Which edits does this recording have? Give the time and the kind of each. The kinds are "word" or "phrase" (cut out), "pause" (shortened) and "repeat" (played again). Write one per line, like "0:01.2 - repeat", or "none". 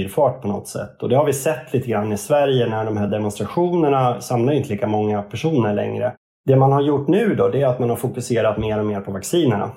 none